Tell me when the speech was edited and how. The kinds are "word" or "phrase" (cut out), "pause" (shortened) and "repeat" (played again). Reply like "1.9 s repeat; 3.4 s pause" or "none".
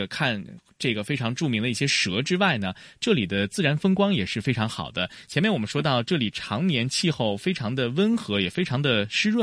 none